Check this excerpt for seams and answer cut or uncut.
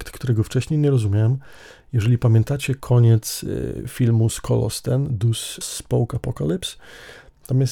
cut